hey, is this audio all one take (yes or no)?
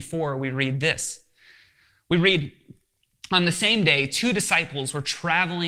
yes